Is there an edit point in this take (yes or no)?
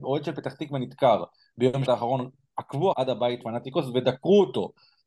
yes